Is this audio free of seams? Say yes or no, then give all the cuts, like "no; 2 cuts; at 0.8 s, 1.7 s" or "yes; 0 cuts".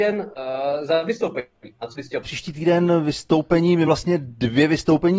no; 2 cuts; at 2.2 s, 3.9 s